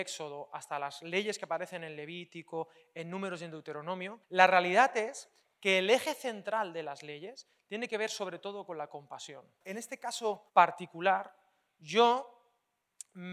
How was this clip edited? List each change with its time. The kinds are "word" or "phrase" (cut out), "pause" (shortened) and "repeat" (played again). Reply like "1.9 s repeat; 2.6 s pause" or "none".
4.2 s pause; 10.5 s pause